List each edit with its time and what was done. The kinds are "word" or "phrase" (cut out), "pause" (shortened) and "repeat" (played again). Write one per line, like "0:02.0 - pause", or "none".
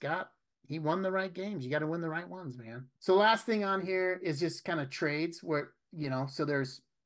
0:02.9 - pause